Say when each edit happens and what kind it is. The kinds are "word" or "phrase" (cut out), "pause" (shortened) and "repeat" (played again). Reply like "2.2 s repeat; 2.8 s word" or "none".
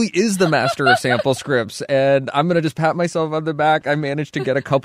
none